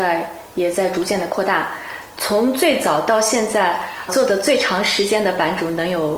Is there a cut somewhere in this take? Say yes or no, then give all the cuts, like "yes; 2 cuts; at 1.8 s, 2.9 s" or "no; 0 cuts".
yes; 1 cut; at 4.1 s